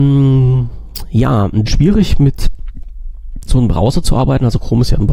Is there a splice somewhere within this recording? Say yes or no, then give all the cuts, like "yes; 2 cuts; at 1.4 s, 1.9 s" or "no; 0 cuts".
yes; 2 cuts; at 1.7 s, 3.5 s